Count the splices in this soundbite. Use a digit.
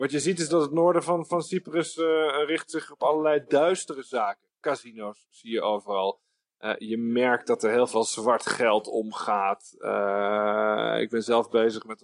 0